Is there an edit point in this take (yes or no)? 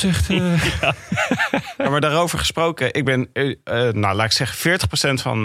no